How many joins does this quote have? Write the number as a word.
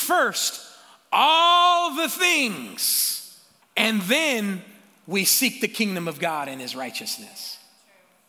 one